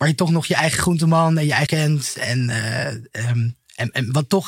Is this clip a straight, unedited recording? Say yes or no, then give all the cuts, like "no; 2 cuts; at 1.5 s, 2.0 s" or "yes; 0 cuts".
no; 1 cut; at 1.7 s